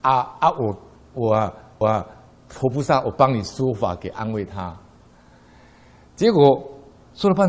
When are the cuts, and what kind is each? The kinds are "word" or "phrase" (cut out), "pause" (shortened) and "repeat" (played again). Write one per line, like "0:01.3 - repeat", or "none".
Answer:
0:01.8 - repeat